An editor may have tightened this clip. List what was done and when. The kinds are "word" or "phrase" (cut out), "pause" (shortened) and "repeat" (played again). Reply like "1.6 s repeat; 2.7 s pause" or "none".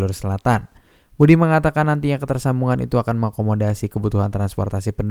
none